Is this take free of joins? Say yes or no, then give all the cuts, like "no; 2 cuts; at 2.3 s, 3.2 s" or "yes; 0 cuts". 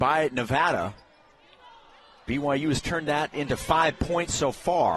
yes; 0 cuts